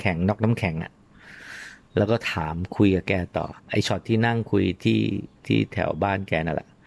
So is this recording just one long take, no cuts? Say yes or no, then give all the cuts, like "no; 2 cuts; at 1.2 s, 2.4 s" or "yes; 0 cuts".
no; 1 cut; at 3.6 s